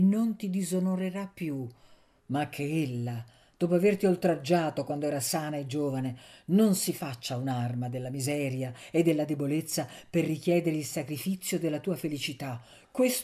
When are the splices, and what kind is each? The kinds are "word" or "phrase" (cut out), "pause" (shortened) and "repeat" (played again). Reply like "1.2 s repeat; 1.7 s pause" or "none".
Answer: none